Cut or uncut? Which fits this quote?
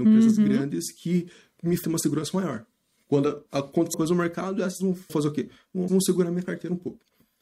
cut